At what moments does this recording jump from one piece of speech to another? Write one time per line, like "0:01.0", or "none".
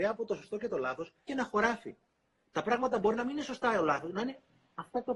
0:01.3